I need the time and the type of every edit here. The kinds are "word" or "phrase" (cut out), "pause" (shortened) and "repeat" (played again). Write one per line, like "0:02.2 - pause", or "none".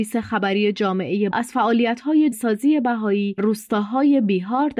0:01.3 - word
0:02.3 - word
0:03.4 - word